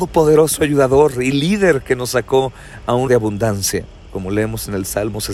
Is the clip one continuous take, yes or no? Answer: no